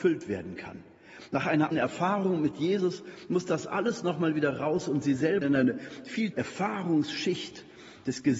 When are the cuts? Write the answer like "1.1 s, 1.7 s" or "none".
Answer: 1.7 s, 5.4 s, 6.3 s

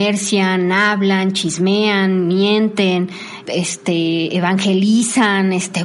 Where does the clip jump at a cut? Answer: 3.5 s

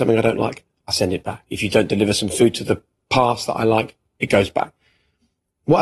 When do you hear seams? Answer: 1.5 s

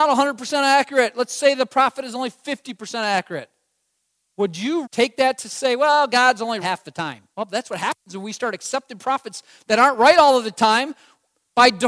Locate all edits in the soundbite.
4.0 s, 4.8 s, 6.6 s, 7.3 s

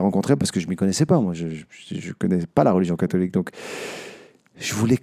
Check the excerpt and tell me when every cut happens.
none

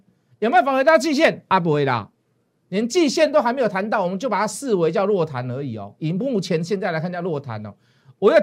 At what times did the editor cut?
none

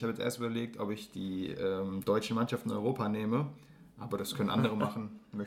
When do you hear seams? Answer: none

